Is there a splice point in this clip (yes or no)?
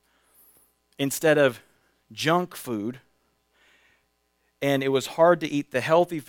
no